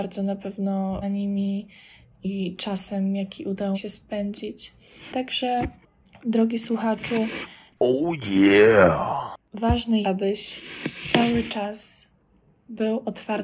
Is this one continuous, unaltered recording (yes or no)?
no